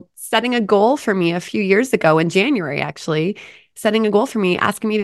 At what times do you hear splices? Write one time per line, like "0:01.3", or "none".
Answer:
none